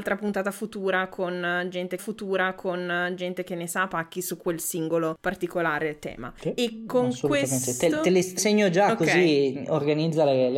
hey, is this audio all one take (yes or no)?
no